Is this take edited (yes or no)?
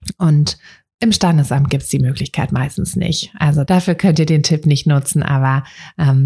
yes